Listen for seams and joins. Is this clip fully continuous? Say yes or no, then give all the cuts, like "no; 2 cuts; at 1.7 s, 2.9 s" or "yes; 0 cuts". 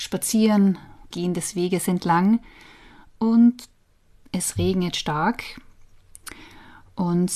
no; 1 cut; at 1.1 s